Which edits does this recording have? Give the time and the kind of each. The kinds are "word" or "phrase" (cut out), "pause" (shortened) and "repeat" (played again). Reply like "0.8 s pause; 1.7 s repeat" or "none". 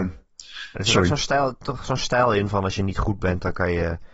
none